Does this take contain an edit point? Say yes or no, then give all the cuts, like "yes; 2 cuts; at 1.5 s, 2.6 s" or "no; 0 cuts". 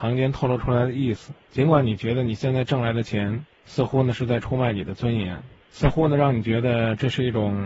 no; 0 cuts